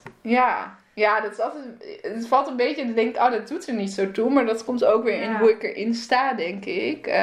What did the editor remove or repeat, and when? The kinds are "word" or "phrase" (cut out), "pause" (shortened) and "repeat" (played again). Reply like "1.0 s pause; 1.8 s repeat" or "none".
none